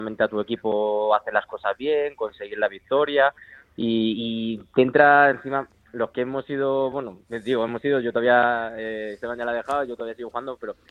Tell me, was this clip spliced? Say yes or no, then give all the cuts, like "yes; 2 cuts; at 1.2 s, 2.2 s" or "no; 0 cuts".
no; 0 cuts